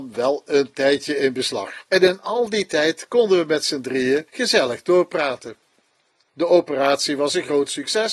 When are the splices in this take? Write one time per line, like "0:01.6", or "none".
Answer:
0:01.9